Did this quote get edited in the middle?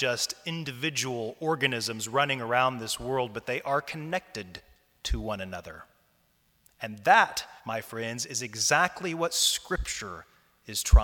yes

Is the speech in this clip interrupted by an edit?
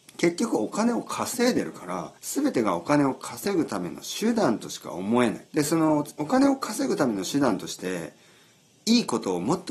yes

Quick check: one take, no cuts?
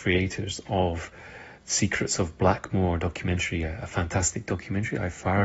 yes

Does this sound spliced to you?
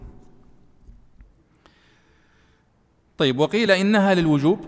no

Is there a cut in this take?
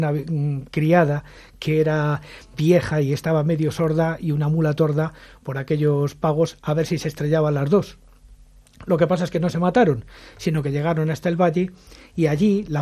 no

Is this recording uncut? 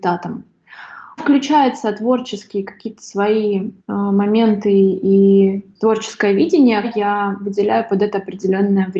no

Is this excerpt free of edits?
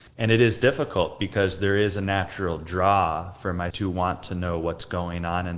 no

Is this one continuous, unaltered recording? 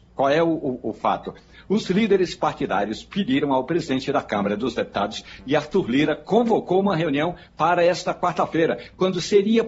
yes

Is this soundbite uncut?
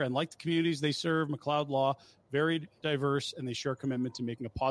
yes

